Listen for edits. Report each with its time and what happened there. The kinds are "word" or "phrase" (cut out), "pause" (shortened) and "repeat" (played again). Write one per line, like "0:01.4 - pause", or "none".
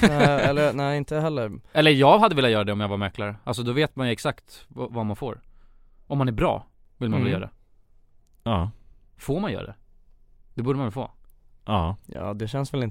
none